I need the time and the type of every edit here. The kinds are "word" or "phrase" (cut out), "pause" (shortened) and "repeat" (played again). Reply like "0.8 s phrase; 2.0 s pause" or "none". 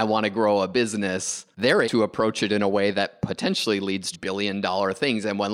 1.8 s word; 4.1 s word